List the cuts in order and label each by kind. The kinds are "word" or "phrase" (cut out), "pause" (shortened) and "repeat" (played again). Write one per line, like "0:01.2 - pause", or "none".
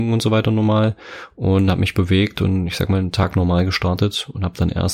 none